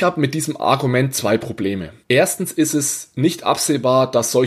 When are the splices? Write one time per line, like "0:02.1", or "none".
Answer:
0:02.0